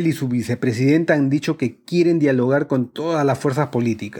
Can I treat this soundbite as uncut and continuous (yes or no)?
yes